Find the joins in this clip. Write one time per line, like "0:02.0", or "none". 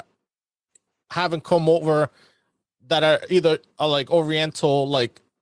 none